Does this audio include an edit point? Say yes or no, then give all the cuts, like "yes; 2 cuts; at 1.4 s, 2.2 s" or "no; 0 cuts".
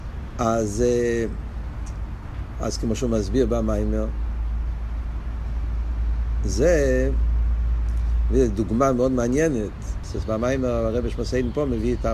no; 0 cuts